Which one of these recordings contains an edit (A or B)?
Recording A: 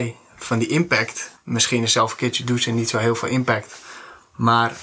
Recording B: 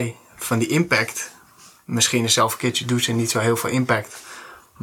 A